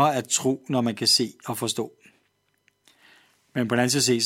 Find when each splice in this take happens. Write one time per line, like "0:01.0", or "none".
none